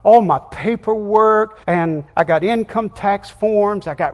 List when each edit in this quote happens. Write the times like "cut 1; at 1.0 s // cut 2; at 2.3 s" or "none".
cut 1; at 1.6 s